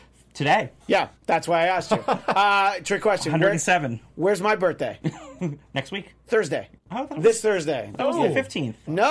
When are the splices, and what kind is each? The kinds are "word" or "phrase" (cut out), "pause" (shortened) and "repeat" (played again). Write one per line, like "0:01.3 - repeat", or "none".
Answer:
0:01.2 - pause
0:06.8 - pause